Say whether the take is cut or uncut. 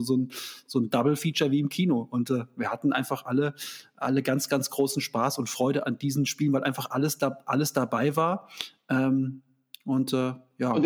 uncut